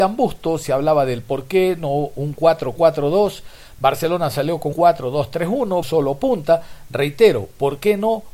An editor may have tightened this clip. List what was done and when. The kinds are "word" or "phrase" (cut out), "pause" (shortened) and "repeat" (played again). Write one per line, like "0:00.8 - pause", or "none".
0:04.7 - word
0:05.8 - phrase